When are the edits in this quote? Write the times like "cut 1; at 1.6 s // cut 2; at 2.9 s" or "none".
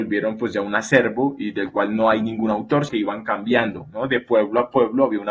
cut 1; at 2.9 s